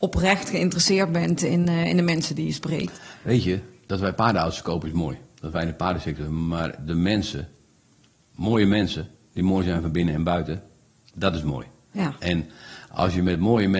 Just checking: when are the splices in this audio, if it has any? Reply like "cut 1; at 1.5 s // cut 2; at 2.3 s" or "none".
none

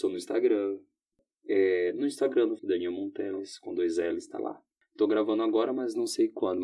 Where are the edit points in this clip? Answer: cut 1; at 2.6 s

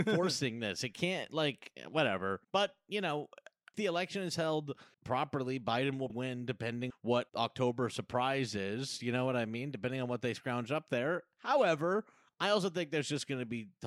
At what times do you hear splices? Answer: cut 1; at 2.4 s // cut 2; at 3.7 s // cut 3; at 4.9 s // cut 4; at 6.1 s // cut 5; at 6.9 s // cut 6; at 7.3 s

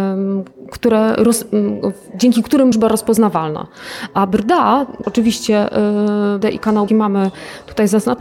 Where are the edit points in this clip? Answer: cut 1; at 2.7 s // cut 2; at 5.0 s // cut 3; at 6.4 s // cut 4; at 6.9 s

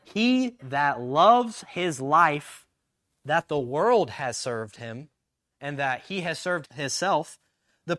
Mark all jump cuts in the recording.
cut 1; at 6.6 s

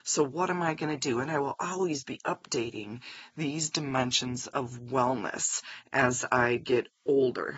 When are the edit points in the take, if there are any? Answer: none

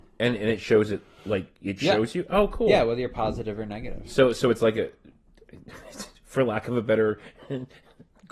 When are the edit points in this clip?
none

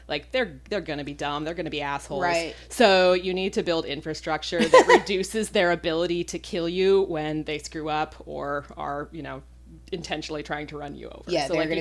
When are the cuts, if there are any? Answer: none

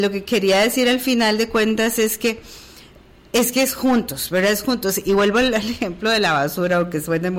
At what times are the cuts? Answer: none

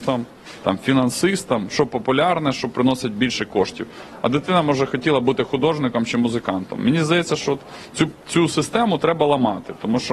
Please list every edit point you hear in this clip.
cut 1; at 8.2 s

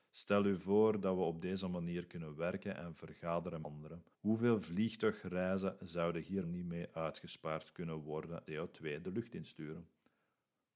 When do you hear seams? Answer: cut 1; at 3.6 s // cut 2; at 4.1 s // cut 3; at 6.4 s // cut 4; at 8.5 s

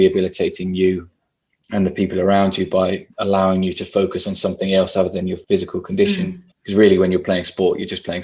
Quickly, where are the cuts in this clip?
cut 1; at 3.1 s // cut 2; at 5.4 s // cut 3; at 6.5 s

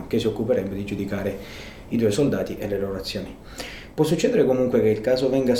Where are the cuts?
none

